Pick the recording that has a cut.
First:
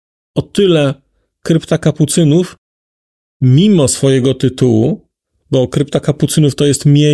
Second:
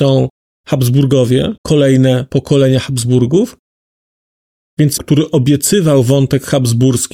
second; 2 cuts; at 1.6 s, 5.0 s

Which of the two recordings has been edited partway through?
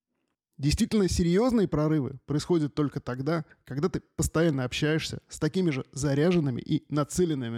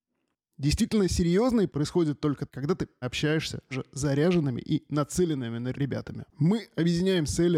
second; 6 cuts; at 1.7 s, 2.5 s, 3.0 s, 3.7 s, 5.7 s, 6.3 s

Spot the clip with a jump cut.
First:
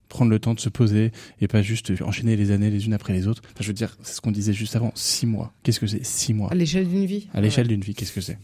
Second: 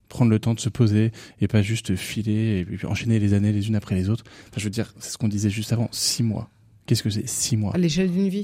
first; 3 cuts; at 2.0 s, 3.5 s, 5.6 s

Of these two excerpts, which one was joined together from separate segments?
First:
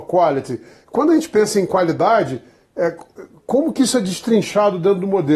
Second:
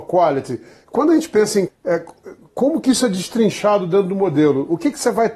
second; 1 cut; at 1.7 s

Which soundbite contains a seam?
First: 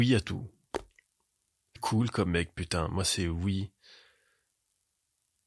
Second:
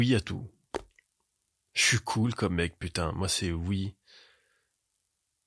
first; 1 cut; at 1.8 s

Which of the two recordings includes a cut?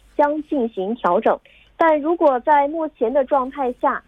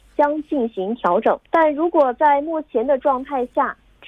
second; 1 cut; at 1.5 s

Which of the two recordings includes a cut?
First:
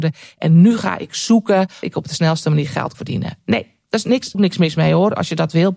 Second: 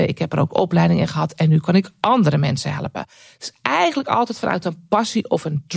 first; 3 cuts; at 1.8 s, 2.9 s, 4.3 s

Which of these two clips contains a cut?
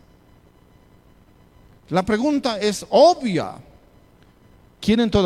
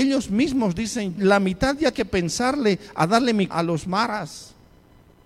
second; 3 cuts; at 1.2 s, 1.9 s, 3.5 s

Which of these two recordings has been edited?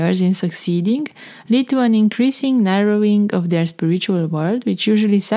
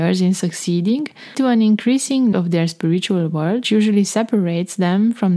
second; 3 cuts; at 1.3 s, 2.3 s, 3.6 s

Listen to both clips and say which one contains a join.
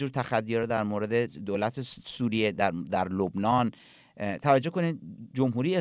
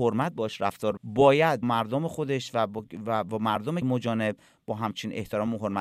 second; 3 cuts; at 1.0 s, 1.6 s, 3.8 s

